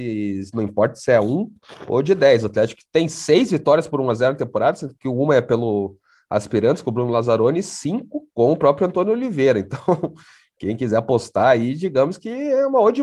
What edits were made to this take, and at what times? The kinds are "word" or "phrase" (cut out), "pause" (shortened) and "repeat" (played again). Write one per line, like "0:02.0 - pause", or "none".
0:08.3 - pause

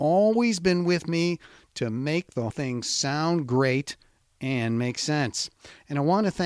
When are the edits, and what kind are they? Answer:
0:02.5 - word

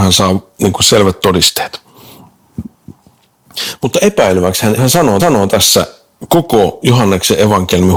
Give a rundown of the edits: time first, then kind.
0:04.8 - phrase
0:05.2 - repeat

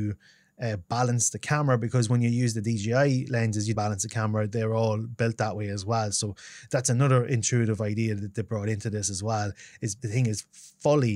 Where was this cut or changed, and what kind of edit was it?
0:03.7 - phrase
0:10.0 - word

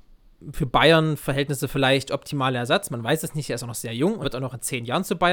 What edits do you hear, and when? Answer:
0:04.2 - word

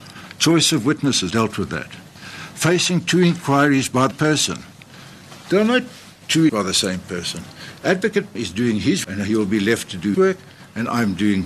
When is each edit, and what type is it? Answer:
0:01.3 - word
0:04.1 - word
0:06.5 - word
0:08.3 - word
0:09.0 - word
0:10.1 - word

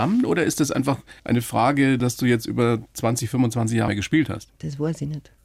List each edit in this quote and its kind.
0:01.2 - pause
0:02.0 - word
0:03.9 - word

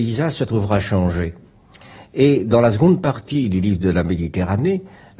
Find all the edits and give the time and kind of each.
none

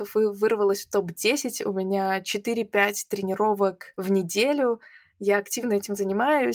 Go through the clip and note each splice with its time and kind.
none

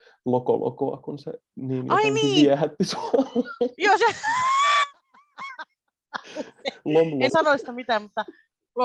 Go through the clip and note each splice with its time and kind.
0:07.3 - word

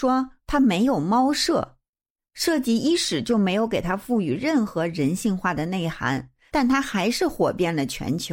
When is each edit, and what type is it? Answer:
none

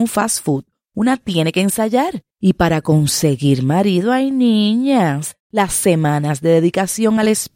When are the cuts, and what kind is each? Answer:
0:02.3 - pause
0:05.4 - pause

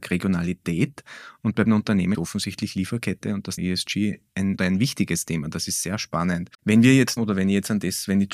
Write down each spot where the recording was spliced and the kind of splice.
0:01.7 - word
0:02.1 - word
0:03.6 - word
0:04.6 - phrase
0:06.5 - pause
0:07.2 - word

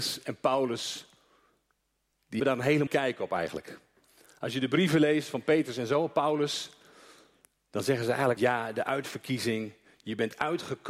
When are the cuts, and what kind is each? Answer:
0:02.4 - word
0:02.9 - word
0:08.4 - word

